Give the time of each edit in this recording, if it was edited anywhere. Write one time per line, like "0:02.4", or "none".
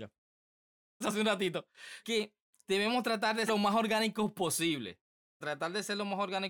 0:01.0
0:02.0
0:02.6
0:03.5
0:05.4